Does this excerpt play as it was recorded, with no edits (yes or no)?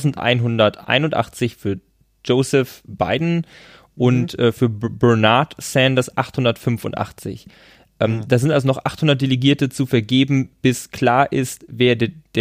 yes